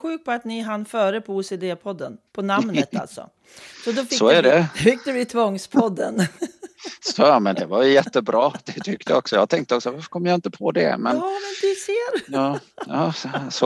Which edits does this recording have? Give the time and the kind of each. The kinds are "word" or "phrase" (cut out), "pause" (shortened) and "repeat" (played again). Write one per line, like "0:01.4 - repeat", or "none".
0:02.3 - pause